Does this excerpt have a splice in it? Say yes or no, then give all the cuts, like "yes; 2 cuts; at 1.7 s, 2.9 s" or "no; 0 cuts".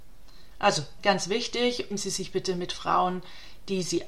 yes; 2 cuts; at 1.0 s, 1.9 s